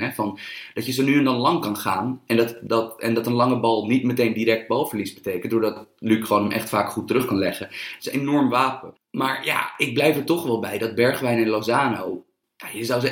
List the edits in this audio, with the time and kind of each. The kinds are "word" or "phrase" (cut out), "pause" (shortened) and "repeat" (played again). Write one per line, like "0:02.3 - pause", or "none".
none